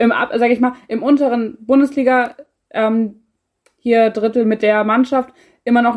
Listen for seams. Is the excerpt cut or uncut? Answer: uncut